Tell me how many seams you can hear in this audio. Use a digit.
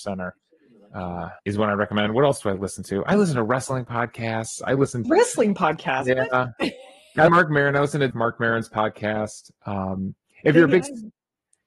4